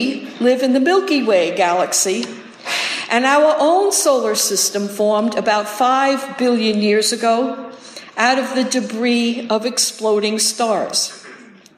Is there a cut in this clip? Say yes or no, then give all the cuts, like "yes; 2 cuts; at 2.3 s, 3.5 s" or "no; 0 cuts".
no; 0 cuts